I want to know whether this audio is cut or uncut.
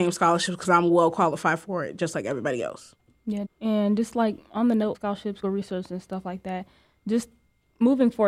cut